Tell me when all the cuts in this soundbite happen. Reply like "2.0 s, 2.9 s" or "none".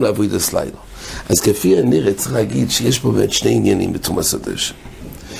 none